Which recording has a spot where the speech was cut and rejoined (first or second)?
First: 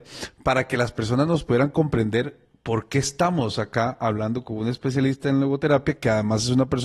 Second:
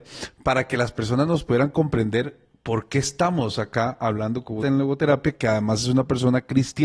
second